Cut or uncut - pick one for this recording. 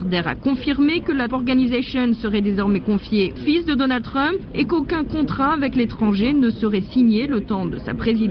cut